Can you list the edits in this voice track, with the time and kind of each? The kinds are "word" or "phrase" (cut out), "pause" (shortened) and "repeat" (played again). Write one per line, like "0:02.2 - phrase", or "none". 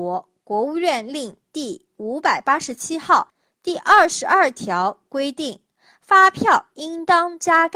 none

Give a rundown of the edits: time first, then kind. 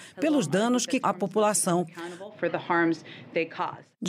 0:01.0 - word

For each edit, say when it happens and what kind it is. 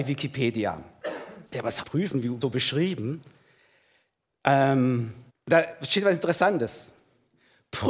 0:01.5 - pause
0:01.8 - phrase
0:02.4 - phrase
0:05.3 - pause

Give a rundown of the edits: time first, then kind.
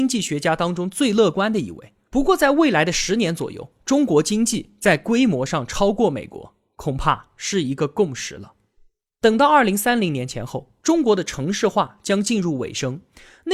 none

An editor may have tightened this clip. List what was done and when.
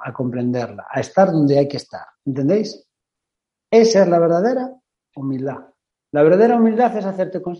0:02.2 - pause

